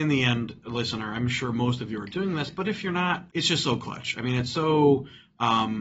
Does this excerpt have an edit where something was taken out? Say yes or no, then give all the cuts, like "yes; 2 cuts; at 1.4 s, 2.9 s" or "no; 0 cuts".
yes; 1 cut; at 3.3 s